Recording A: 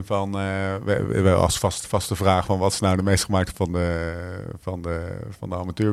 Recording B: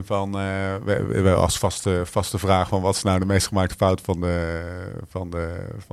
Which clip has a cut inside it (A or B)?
A